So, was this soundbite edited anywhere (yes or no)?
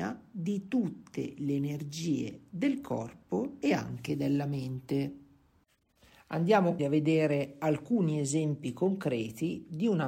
yes